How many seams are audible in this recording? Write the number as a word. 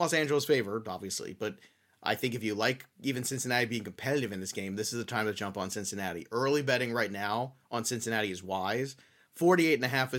zero